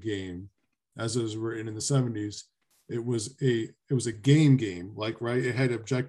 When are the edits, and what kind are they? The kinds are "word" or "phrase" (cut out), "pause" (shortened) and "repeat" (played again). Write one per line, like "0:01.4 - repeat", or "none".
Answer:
none